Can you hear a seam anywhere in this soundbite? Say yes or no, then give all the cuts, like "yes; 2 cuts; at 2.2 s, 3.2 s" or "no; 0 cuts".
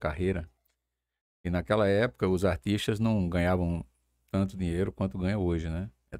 no; 0 cuts